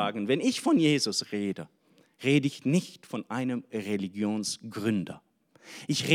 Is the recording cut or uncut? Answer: uncut